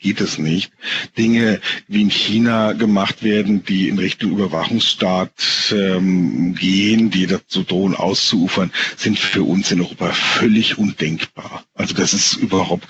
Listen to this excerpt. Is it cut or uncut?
uncut